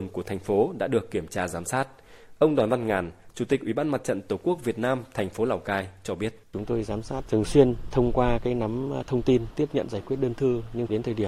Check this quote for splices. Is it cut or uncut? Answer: cut